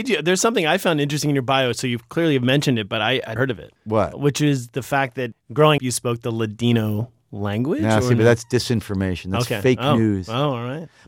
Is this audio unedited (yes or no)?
no